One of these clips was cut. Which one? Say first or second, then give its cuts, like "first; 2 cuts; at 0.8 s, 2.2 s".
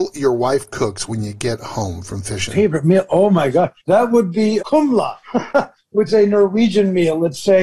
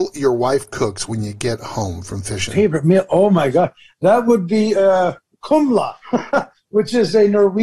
first; 3 cuts; at 3.8 s, 4.6 s, 6.1 s